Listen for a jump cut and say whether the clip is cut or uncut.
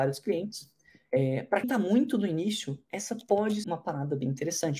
cut